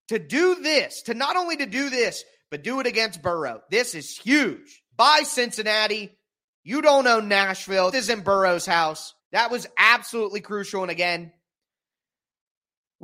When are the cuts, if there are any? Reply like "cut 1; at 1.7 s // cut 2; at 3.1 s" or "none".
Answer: cut 1; at 4.9 s // cut 2; at 7.9 s // cut 3; at 9.2 s